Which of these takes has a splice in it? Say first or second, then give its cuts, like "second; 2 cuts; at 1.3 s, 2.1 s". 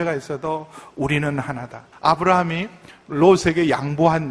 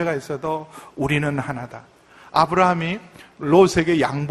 first; 1 cut; at 1.9 s